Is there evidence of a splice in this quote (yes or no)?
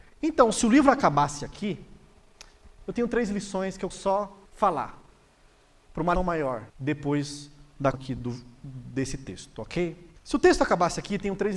yes